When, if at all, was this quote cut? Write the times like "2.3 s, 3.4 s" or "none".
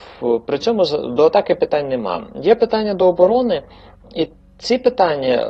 none